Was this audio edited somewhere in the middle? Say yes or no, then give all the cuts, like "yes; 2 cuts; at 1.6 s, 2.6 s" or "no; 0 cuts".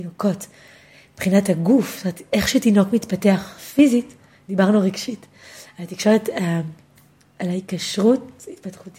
no; 0 cuts